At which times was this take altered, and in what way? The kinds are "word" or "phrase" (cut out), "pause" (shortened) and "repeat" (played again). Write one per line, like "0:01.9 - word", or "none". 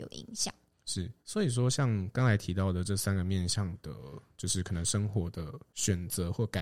0:01.2 - pause